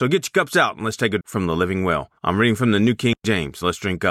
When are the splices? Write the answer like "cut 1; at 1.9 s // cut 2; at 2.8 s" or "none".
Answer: cut 1; at 1.2 s // cut 2; at 2.2 s